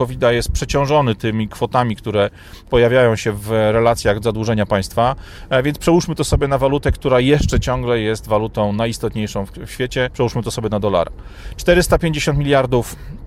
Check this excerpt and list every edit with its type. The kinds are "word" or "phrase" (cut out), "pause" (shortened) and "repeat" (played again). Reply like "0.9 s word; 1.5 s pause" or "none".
4.2 s word; 10.1 s word

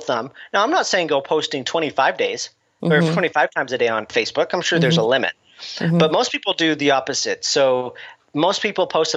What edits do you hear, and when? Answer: none

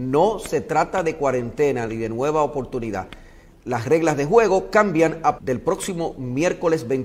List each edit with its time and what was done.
5.4 s word

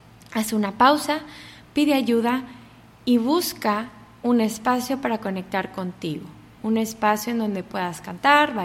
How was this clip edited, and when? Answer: none

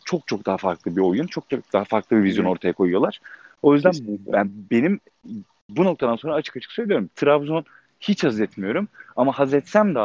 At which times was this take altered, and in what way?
none

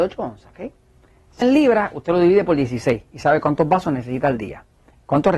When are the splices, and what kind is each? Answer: 1.4 s phrase

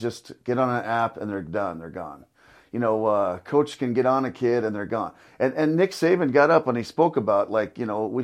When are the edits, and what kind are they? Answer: none

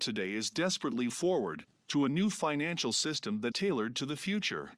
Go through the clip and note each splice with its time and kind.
1.1 s word; 3.5 s word

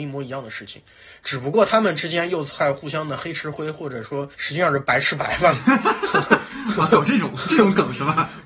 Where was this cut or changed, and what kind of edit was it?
4.3 s pause

